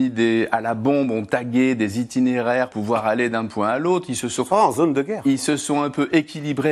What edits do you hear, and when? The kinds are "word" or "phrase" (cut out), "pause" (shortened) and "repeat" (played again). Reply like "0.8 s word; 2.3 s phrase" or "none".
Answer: 2.7 s word